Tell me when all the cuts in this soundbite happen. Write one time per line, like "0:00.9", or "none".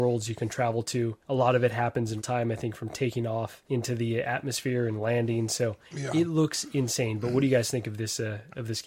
0:01.2
0:02.2
0:03.6
0:05.8

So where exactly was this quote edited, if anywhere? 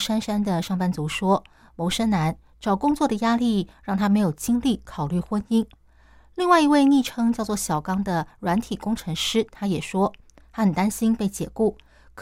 none

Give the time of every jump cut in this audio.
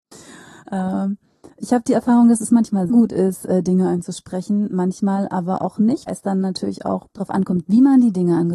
0:02.9
0:06.1

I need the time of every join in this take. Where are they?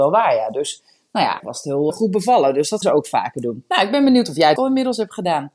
0:01.4
0:01.9
0:02.8
0:04.6

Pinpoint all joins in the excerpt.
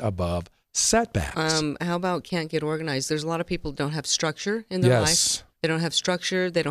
0:05.5

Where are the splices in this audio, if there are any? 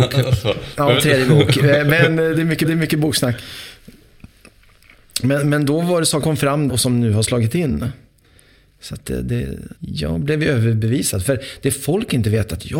0:02.6
0:06.2
0:06.7
0:09.8

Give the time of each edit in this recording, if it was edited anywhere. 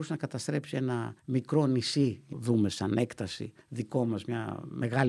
0:01.2
0:02.3
0:03.6

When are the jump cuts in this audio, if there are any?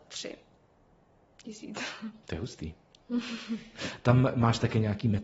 0:02.2

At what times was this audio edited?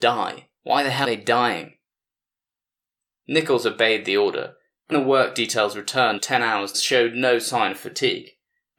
0:01.0
0:04.9
0:06.2
0:06.7

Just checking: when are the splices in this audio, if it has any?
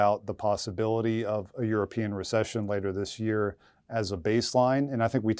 none

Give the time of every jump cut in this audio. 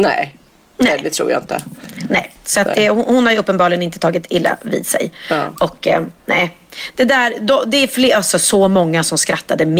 0:06.2

